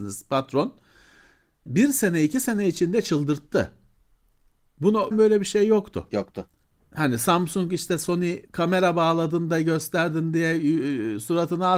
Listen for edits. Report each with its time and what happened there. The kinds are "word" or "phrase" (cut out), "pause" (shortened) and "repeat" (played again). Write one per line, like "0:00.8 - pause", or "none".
0:01.7 - word
0:05.1 - word
0:06.6 - pause
0:08.5 - pause